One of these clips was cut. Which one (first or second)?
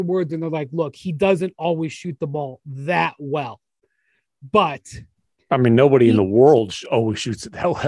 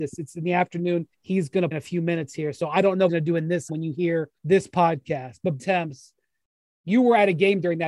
second